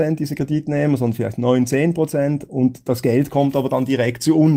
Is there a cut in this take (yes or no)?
no